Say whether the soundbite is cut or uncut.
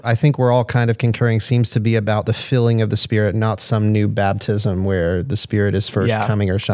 uncut